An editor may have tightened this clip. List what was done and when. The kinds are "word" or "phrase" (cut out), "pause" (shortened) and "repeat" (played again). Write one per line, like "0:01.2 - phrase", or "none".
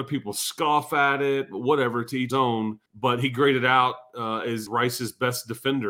0:02.3 - word
0:02.9 - pause
0:04.7 - word